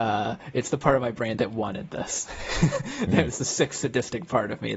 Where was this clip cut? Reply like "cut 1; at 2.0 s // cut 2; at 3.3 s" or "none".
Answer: cut 1; at 1.4 s